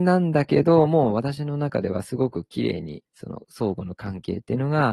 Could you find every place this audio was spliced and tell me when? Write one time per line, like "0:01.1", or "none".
0:03.1